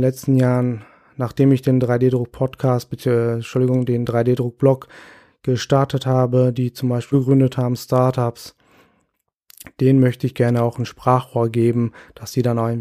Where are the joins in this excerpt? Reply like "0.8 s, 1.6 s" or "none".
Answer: 7.1 s